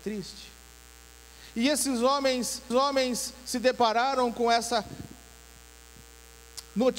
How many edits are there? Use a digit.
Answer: 1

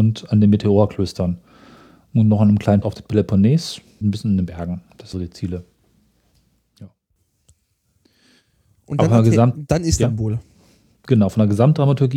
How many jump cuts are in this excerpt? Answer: 3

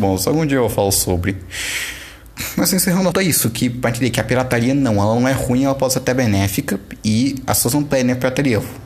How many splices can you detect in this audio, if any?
1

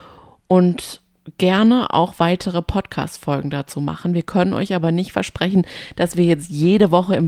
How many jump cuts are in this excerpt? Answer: 0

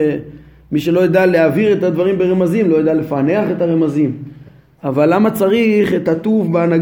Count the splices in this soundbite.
0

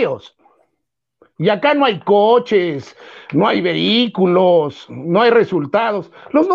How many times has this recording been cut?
0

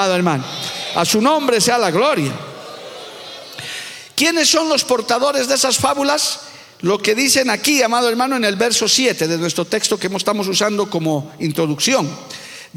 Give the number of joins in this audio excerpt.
0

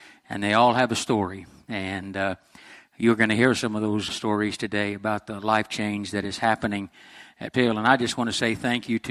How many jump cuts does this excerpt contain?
2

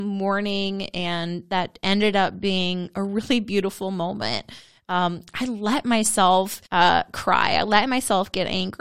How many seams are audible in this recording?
1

